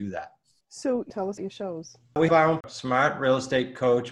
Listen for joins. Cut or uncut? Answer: cut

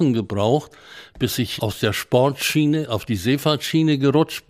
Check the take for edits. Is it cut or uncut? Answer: cut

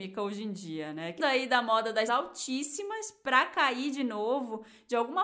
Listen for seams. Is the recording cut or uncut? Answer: cut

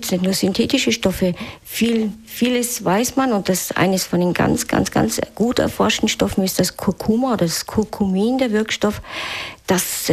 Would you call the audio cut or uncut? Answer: uncut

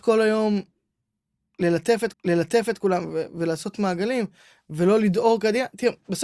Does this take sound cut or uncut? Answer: cut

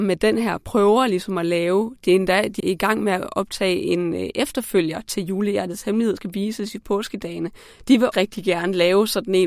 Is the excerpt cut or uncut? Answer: cut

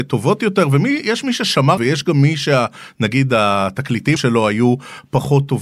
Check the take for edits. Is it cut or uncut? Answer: cut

